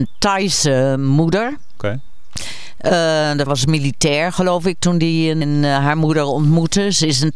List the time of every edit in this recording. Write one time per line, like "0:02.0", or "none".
0:03.5
0:05.4